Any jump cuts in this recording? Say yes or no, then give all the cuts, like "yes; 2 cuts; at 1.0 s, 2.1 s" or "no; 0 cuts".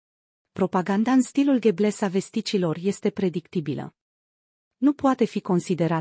no; 0 cuts